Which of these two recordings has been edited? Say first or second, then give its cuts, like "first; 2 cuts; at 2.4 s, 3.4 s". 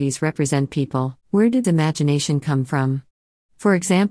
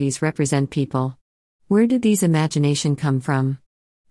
first; 2 cuts; at 1.2 s, 1.6 s